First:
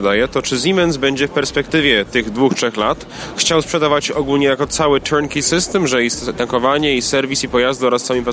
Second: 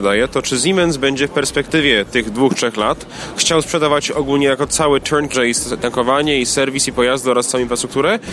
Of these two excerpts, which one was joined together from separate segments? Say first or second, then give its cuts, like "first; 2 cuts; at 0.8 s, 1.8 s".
second; 1 cut; at 5.3 s